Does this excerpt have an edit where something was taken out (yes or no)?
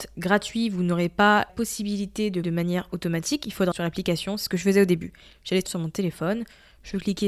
yes